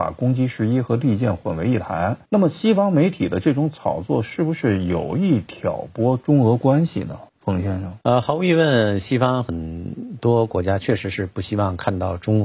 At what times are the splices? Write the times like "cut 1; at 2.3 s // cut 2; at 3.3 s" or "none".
cut 1; at 2.3 s // cut 2; at 7.3 s // cut 3; at 8.0 s